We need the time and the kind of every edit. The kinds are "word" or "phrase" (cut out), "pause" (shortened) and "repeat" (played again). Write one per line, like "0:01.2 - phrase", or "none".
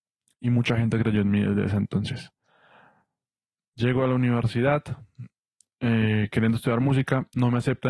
none